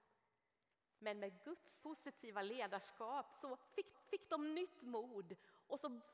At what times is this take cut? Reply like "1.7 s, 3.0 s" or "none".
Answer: 1.8 s, 3.9 s

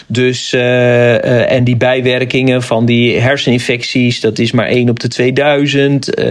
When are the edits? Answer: none

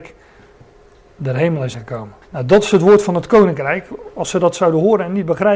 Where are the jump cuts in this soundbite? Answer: 1.7 s, 2.2 s

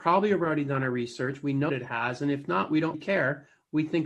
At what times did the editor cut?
1.7 s, 2.9 s

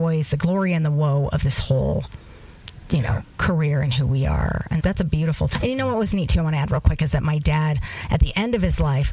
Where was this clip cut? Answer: 4.8 s, 5.5 s

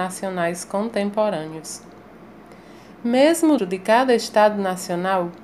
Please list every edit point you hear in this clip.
3.6 s

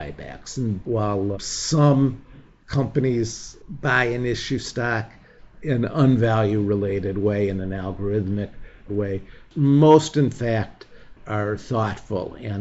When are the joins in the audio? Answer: 1.3 s, 8.9 s

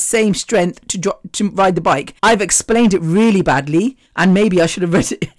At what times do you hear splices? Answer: 2.2 s, 4.1 s

